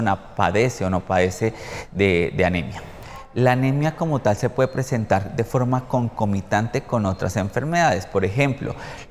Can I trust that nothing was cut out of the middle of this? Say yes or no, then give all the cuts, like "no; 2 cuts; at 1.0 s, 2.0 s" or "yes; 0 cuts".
yes; 0 cuts